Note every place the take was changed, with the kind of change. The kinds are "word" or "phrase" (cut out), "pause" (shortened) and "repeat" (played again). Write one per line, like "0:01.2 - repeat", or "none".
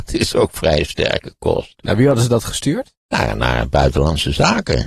0:03.0 - pause